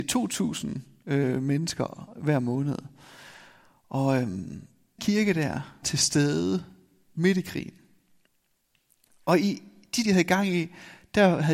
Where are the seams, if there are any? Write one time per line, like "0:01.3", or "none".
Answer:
0:05.0
0:05.8
0:10.0